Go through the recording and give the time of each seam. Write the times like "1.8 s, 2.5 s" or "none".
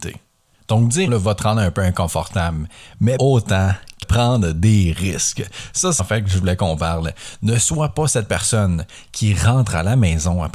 1.1 s, 3.2 s, 4.0 s, 6.0 s